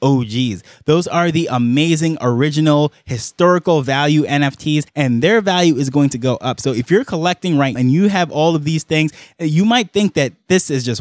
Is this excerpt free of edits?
no; 2 cuts; at 4.9 s, 7.8 s

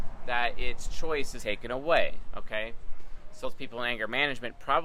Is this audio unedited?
no; 2 cuts; at 1.4 s, 3.4 s

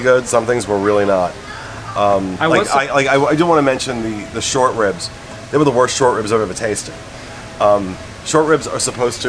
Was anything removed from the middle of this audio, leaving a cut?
no; 0 cuts

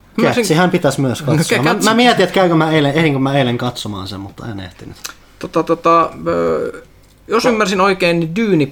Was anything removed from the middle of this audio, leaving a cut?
no; 0 cuts

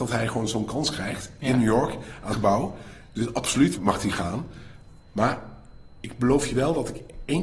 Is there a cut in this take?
yes; 2 cuts; at 2.3 s, 3.8 s

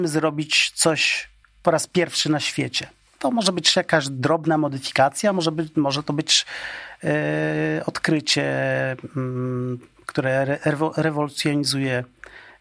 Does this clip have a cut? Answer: yes; 1 cut; at 1.4 s

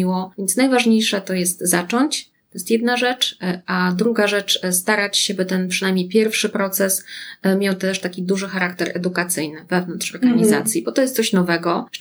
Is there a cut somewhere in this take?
no; 0 cuts

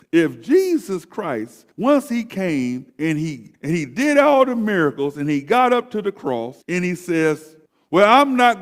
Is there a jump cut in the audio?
yes; 5 cuts; at 1.7 s, 2.9 s, 3.5 s, 6.6 s, 7.7 s

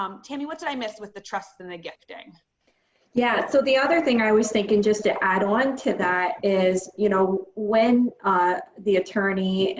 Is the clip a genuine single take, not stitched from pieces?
yes; 0 cuts

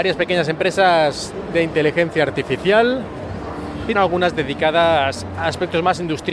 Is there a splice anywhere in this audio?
yes; 1 cut; at 3.9 s

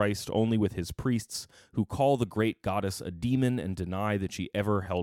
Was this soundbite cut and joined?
no; 0 cuts

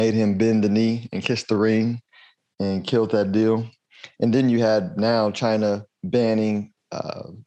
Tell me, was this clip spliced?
no; 0 cuts

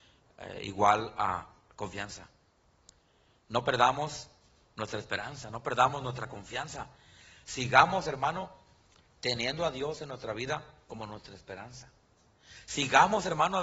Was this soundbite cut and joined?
no; 0 cuts

